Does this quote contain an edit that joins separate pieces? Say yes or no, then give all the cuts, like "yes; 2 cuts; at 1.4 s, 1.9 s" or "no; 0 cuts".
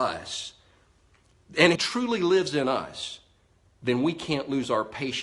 yes; 1 cut; at 1.8 s